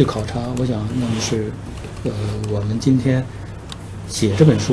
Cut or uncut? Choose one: uncut